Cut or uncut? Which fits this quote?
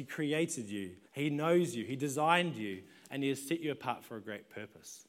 cut